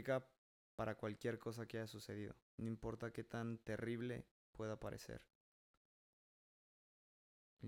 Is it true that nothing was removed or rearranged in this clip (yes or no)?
no